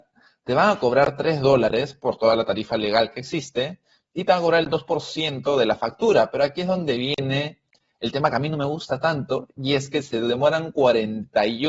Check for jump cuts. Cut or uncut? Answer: uncut